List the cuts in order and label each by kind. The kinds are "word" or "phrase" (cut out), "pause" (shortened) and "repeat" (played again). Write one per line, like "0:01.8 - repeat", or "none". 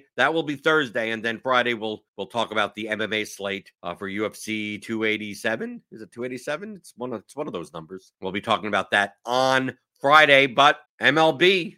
0:02.1 - pause
0:03.7 - pause
0:08.1 - pause
0:10.9 - pause

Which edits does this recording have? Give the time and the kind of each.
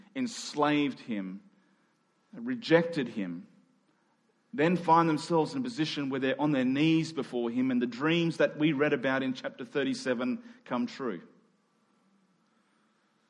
none

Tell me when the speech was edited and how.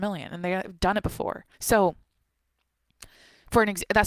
0:01.5 - pause

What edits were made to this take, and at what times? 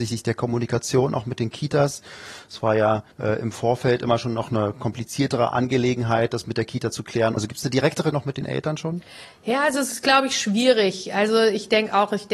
0:03.1 - pause
0:08.1 - word

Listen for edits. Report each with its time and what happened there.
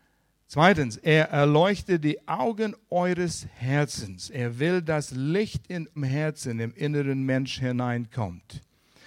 0:06.0 - word

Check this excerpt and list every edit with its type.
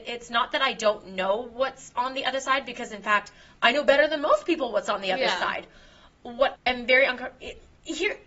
0:06.6 - word

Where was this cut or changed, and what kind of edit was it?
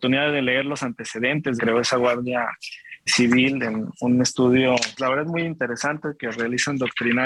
0:01.6 - phrase
0:03.1 - word
0:05.0 - word

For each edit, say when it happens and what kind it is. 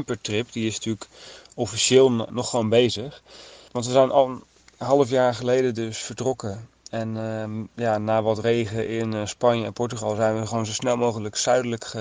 none

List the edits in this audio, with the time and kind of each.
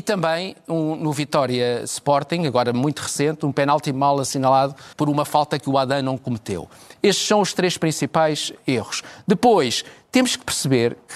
0:04.9 - pause

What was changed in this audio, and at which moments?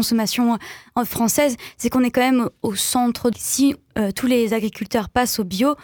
0:03.3 - phrase

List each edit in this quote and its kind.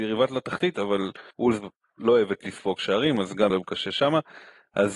0:01.3 - pause
0:03.5 - word

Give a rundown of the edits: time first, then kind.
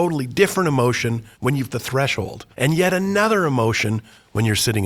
0:01.3 - pause
0:01.7 - word
0:02.5 - pause

